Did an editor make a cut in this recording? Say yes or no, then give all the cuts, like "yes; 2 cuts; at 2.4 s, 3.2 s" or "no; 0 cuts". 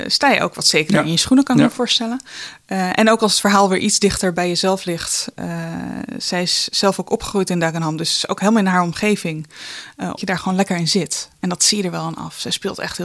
yes; 1 cut; at 10.2 s